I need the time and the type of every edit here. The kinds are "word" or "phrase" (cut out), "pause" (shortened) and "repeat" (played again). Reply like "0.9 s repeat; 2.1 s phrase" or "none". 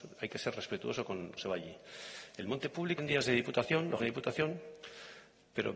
1.4 s word; 3.0 s word; 4.0 s word